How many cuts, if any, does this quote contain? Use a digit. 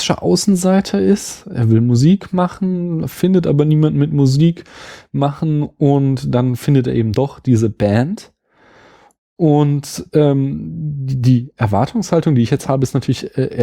0